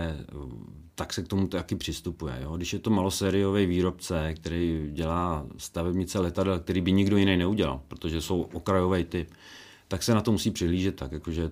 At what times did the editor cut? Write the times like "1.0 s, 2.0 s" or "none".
none